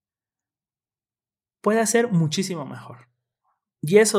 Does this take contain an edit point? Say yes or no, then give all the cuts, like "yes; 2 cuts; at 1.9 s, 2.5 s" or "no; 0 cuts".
no; 0 cuts